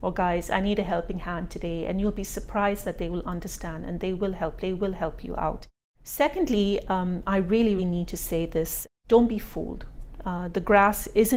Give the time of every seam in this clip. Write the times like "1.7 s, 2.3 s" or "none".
4.6 s, 7.8 s

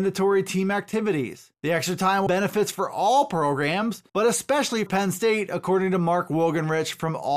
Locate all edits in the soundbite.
1.5 s, 2.3 s, 4.1 s, 4.9 s

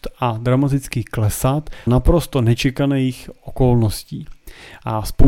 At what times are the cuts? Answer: 1.9 s

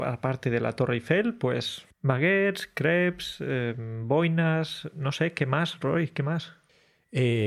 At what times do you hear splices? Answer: none

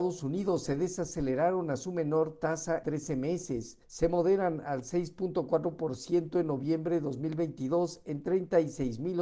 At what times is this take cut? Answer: 2.8 s, 3.8 s

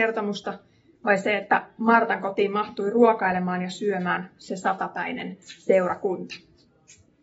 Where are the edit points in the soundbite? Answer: none

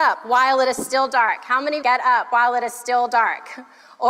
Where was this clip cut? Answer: 1.8 s

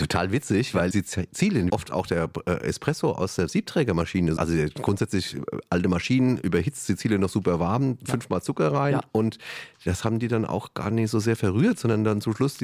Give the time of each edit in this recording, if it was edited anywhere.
0.9 s, 1.7 s, 4.4 s

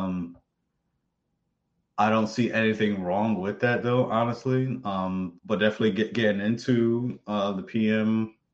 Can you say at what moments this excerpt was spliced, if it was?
5.4 s

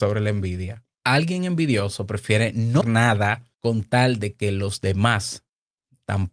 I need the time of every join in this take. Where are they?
0.9 s, 2.8 s, 3.5 s

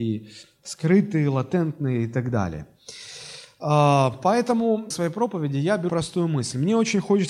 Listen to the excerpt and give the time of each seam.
4.9 s, 5.9 s

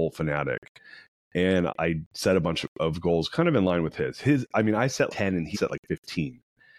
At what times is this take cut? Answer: 1.7 s, 5.1 s, 5.5 s

